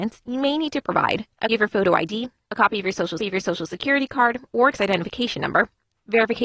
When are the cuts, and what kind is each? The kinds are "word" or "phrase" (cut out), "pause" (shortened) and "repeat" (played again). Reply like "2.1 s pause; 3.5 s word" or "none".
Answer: 1.5 s word; 3.2 s repeat; 4.7 s word